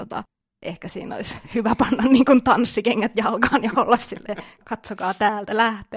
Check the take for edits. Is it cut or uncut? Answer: uncut